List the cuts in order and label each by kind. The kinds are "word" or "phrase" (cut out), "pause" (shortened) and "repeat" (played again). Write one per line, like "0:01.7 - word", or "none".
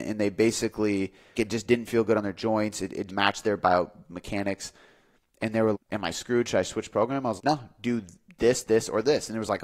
0:01.3 - word
0:03.1 - word
0:05.7 - word
0:07.4 - word
0:08.6 - word